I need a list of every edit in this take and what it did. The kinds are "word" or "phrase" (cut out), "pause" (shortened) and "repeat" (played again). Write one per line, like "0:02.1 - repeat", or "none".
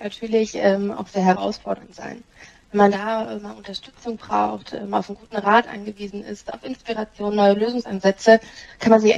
none